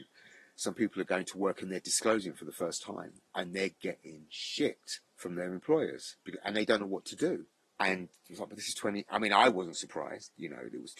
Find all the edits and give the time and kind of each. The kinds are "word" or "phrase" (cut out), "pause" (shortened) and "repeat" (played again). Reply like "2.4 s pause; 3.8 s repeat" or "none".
5.1 s pause; 7.6 s pause